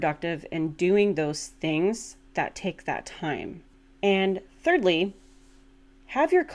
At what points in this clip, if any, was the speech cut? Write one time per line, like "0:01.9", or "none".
none

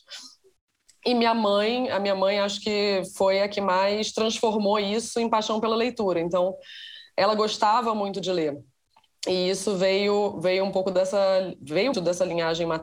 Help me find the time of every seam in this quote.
0:11.9

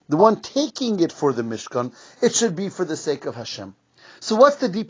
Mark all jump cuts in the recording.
none

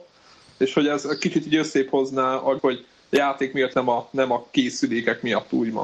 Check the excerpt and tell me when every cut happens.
0:02.6
0:03.7

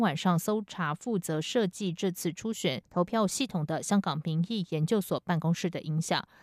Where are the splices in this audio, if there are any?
0:02.8

